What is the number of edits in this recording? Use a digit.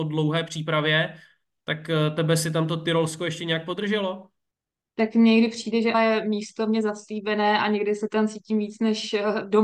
2